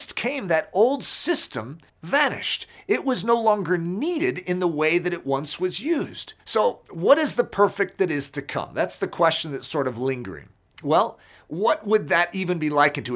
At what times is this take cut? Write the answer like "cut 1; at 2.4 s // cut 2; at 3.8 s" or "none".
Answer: cut 1; at 1.9 s // cut 2; at 6.4 s // cut 3; at 10.7 s